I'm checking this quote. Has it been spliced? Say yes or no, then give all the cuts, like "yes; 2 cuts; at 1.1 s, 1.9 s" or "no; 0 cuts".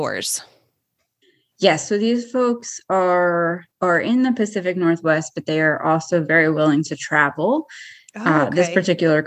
yes; 1 cut; at 3.7 s